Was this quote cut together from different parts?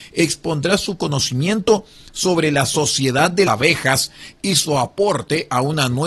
yes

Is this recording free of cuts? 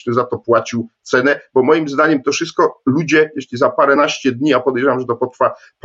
yes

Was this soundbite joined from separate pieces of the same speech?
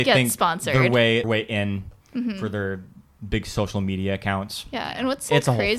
yes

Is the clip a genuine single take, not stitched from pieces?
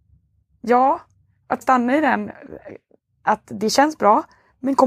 no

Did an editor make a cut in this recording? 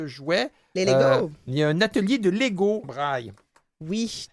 yes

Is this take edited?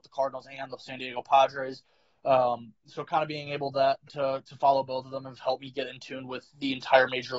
no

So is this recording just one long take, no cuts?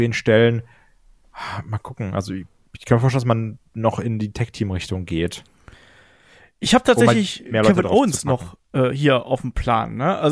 no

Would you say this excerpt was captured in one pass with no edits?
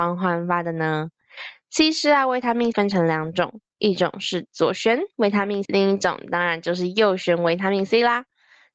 no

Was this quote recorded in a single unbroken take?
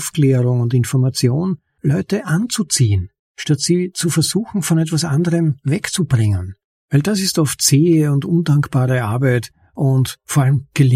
yes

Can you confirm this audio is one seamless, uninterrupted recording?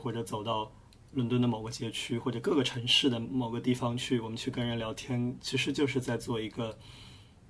no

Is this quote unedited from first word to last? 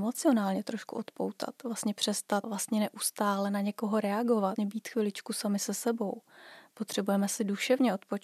no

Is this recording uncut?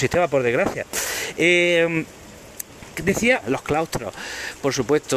no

